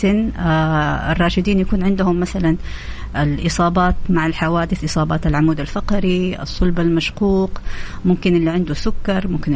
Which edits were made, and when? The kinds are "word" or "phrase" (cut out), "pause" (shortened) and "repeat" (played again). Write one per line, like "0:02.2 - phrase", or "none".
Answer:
none